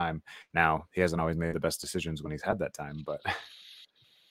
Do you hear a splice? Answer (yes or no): no